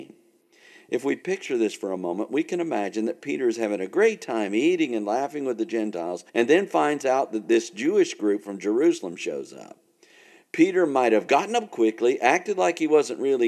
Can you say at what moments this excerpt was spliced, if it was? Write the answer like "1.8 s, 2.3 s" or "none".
6.3 s